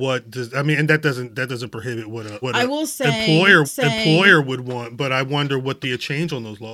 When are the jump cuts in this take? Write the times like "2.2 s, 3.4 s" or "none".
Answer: 2.4 s, 3.6 s, 5.8 s